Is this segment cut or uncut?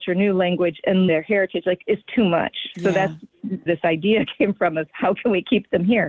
cut